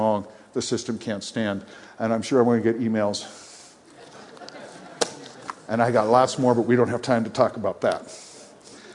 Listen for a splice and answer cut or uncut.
uncut